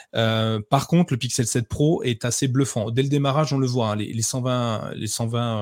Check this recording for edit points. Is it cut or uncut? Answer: uncut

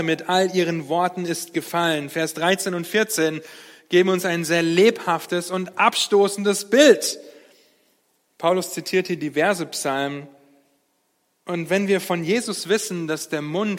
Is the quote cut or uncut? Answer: uncut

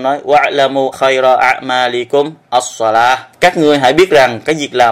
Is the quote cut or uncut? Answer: cut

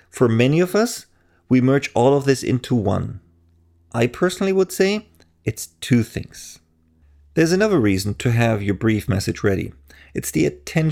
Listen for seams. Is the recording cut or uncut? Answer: uncut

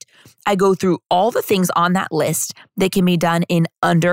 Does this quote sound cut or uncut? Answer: uncut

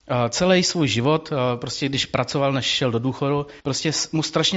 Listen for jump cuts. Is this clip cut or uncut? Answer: cut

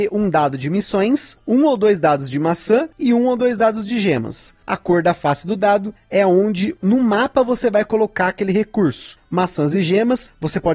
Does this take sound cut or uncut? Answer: uncut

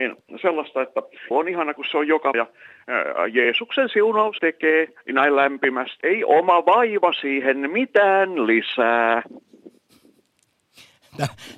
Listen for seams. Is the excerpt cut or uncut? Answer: cut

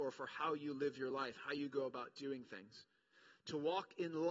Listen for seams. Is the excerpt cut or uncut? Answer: uncut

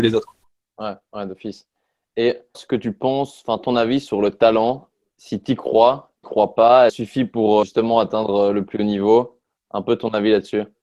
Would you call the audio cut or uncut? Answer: cut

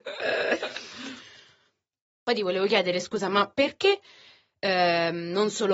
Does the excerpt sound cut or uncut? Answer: uncut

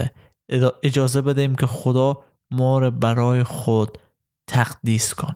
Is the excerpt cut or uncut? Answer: uncut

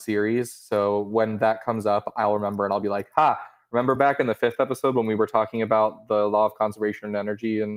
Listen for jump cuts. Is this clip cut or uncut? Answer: uncut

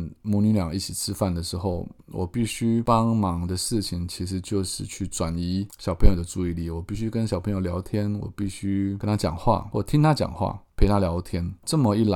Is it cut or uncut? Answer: cut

